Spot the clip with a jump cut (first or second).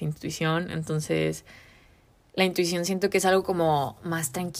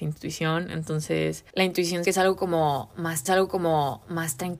second